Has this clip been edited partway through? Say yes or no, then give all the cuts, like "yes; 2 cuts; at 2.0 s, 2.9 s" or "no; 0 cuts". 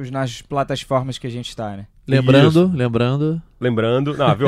no; 0 cuts